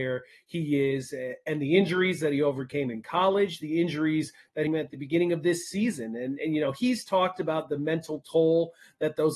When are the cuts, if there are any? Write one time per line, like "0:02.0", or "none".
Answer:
0:04.7